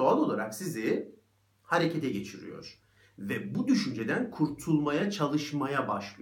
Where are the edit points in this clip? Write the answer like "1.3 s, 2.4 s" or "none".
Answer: none